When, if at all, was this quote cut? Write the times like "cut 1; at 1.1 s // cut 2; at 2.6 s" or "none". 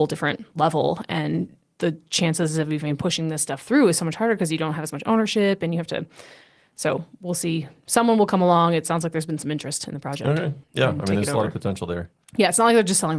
cut 1; at 10.6 s